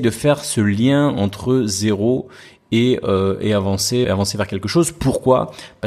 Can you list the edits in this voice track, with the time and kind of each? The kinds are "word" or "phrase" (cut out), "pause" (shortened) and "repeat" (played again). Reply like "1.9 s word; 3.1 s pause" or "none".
4.0 s word